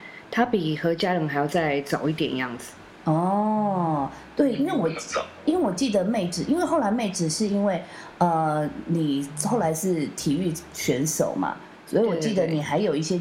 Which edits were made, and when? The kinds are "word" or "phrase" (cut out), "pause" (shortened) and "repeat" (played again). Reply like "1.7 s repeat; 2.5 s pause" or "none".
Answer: none